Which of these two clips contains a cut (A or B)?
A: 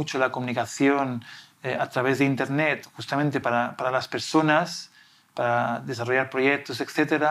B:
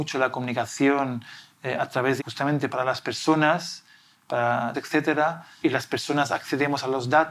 B